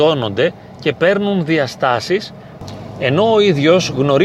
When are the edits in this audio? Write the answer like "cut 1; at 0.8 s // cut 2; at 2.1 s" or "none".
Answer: none

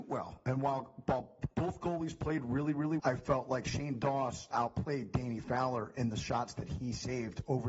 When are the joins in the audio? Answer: cut 1; at 3.0 s // cut 2; at 4.5 s

